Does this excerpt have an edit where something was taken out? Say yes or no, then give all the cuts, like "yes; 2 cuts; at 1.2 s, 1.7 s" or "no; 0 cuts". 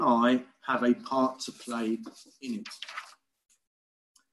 no; 0 cuts